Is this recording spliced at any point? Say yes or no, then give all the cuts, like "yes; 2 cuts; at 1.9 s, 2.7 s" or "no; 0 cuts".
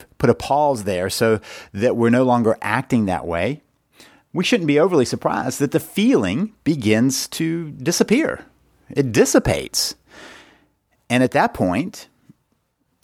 no; 0 cuts